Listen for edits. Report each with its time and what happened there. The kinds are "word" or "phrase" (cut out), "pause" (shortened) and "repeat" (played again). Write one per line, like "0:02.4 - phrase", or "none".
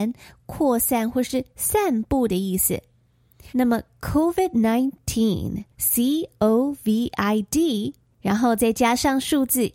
0:03.5 - pause
0:05.7 - pause

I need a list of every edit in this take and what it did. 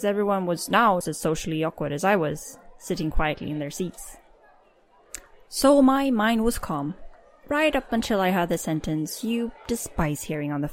0:01.0 - word

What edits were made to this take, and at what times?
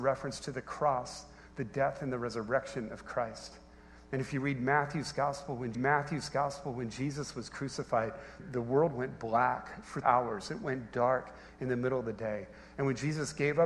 0:05.7 - repeat
0:08.4 - word
0:10.0 - word

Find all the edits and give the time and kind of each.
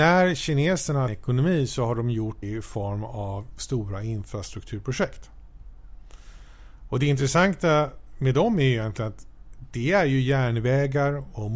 0:01.1 - phrase
0:02.4 - word

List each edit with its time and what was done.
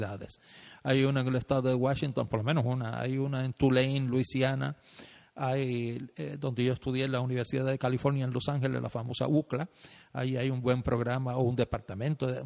none

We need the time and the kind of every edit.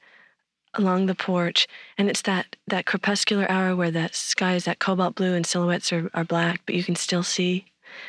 none

